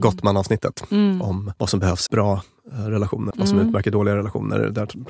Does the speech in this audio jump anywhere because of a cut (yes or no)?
yes